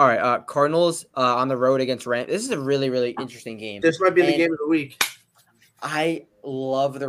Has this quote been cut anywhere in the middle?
no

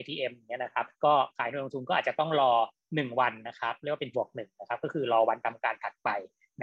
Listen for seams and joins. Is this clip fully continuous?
no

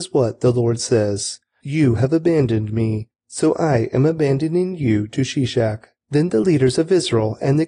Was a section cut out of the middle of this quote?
no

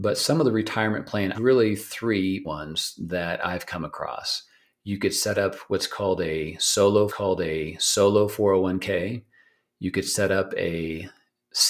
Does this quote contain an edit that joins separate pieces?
yes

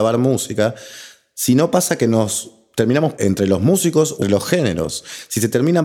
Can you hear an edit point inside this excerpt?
yes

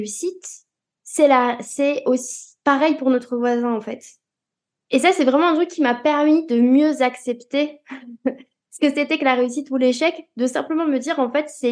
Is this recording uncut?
yes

